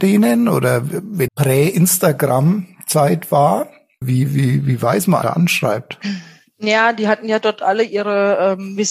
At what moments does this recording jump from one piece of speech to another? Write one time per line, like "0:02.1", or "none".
0:01.3
0:04.0
0:05.2